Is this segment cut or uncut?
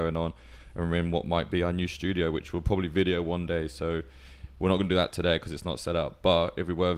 uncut